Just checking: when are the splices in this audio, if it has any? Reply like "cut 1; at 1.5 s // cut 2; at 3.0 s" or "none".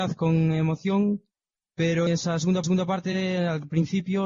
cut 1; at 2.1 s // cut 2; at 2.6 s

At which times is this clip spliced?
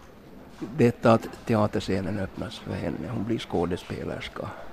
none

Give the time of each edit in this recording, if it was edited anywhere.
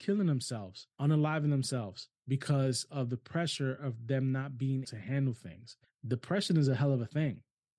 cut 1; at 0.9 s // cut 2; at 2.2 s // cut 3; at 4.8 s // cut 4; at 5.8 s

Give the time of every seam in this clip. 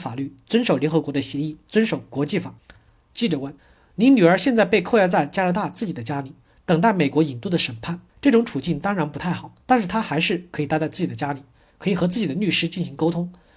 cut 1; at 2.6 s // cut 2; at 3.6 s // cut 3; at 8.1 s // cut 4; at 9.6 s

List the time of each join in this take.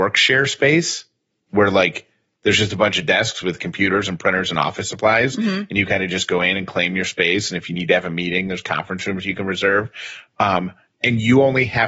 none

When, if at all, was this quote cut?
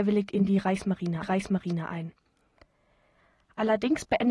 cut 1; at 1.2 s

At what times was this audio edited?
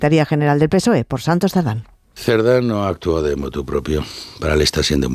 none

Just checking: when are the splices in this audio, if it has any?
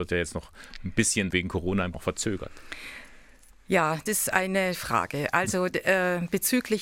cut 1; at 1.3 s // cut 2; at 1.9 s // cut 3; at 4.1 s // cut 4; at 4.7 s

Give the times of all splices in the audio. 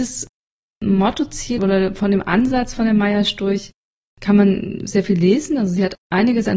none

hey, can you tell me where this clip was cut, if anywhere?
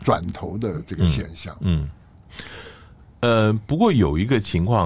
none

